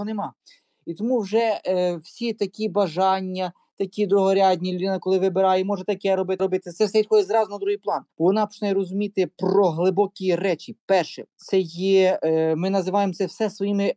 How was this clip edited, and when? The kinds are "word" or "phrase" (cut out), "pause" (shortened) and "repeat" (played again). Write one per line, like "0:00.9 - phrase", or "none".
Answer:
0:06.4 - phrase
0:08.1 - pause
0:11.3 - pause